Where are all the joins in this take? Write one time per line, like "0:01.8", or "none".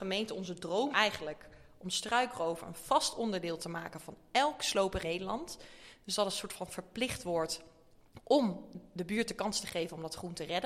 0:00.9
0:05.0